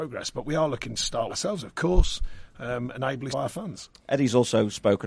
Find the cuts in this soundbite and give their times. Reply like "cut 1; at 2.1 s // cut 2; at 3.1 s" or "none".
cut 1; at 1.3 s // cut 2; at 3.3 s